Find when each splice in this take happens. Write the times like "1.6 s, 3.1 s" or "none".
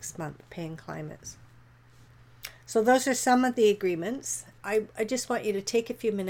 4.6 s